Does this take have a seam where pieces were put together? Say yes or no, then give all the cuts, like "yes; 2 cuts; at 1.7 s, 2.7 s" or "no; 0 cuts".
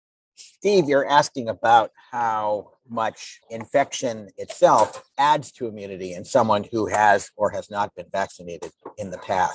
no; 0 cuts